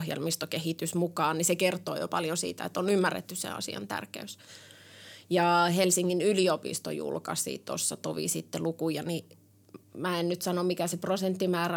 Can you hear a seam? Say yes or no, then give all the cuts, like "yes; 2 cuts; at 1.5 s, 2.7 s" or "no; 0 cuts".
yes; 1 cut; at 9.8 s